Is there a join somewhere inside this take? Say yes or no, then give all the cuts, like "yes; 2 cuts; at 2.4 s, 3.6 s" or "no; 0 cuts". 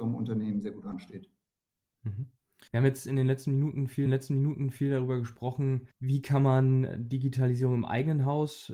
yes; 3 cuts; at 2.7 s, 4.1 s, 5.9 s